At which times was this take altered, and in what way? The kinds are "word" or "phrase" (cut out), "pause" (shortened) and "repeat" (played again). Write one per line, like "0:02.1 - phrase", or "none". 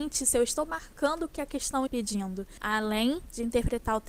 0:01.9 - word